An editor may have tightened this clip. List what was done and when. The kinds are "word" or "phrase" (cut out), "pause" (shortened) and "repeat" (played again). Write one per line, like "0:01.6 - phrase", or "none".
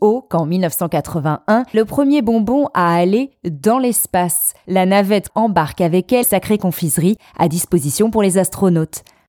0:01.7 - word
0:05.3 - word
0:06.2 - word